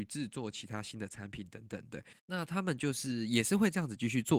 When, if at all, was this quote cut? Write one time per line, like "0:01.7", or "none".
0:02.2